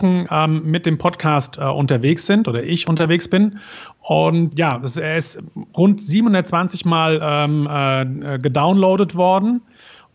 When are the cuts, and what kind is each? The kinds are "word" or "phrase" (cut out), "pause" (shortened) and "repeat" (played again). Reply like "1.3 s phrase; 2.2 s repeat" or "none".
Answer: none